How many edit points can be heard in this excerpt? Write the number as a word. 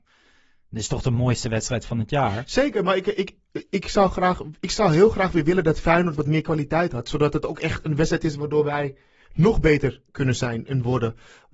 one